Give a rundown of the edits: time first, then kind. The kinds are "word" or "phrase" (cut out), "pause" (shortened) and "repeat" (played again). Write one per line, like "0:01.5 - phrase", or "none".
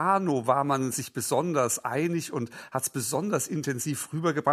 none